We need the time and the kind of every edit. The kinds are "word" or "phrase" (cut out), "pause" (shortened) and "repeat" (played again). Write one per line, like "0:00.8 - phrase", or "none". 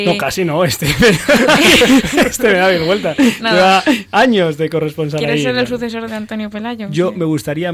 0:06.1 - word

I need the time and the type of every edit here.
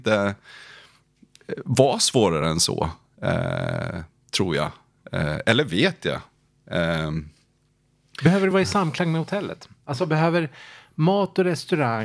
none

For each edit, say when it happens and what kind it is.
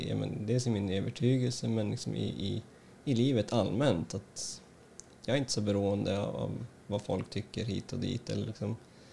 none

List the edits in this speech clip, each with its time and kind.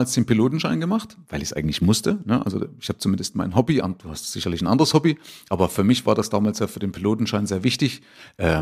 none

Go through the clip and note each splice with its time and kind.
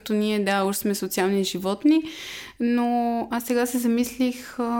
none

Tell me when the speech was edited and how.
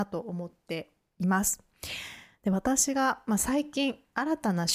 none

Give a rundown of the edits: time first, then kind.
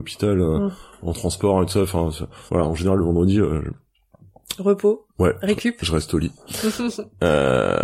0:02.5 - pause

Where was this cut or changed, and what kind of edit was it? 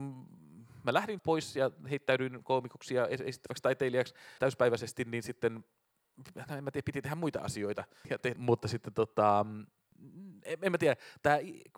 0:01.2 - word
0:04.4 - word
0:08.4 - phrase

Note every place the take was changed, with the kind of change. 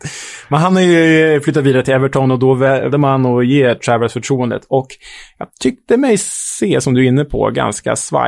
0:02.9 - word

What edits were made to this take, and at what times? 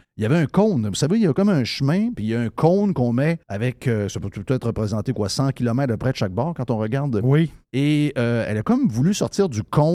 0:03.4 - pause

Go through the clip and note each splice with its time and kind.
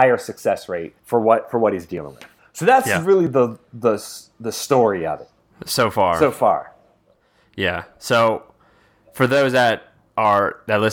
0:01.0 - pause
0:02.4 - pause
0:05.5 - pause

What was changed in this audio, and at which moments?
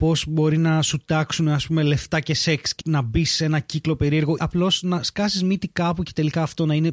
0:02.8 - word
0:04.4 - word

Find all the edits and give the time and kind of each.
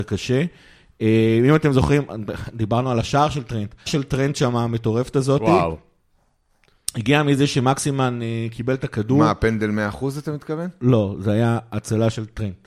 0:03.9 - word

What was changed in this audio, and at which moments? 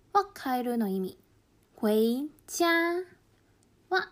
0:01.3 - pause

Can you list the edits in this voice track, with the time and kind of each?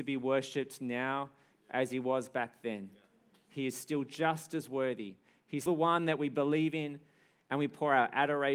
0:05.7 - word

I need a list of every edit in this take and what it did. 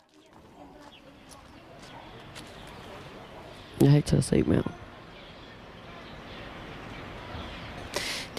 0:04.0 - word

